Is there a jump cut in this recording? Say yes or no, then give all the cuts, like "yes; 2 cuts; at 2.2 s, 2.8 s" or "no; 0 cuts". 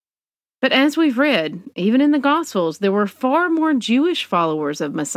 no; 0 cuts